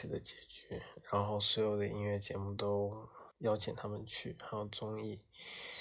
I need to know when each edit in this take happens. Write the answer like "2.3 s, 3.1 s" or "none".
3.3 s